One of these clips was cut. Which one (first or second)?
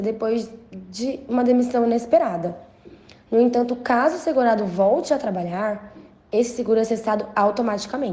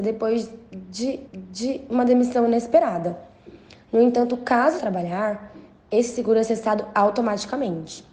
second